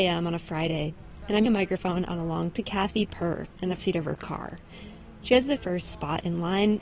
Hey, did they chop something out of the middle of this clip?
yes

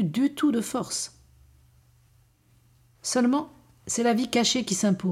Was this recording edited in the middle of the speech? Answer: no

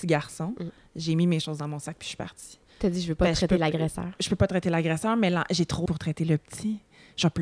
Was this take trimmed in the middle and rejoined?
yes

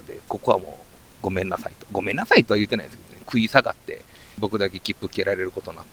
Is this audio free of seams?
yes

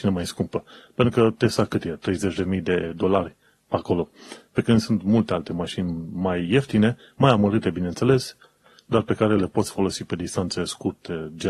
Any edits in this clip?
no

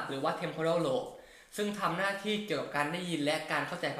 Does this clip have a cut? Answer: no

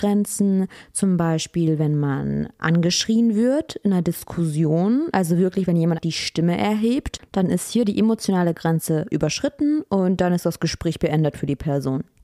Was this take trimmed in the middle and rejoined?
yes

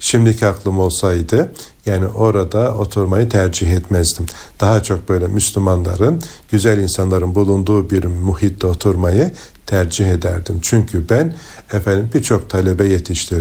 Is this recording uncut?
yes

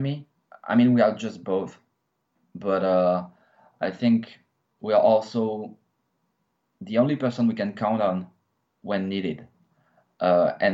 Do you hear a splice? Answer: no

